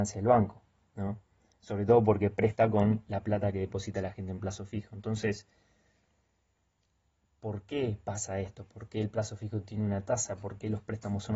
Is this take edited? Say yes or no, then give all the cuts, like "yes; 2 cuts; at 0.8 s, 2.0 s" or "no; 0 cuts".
no; 0 cuts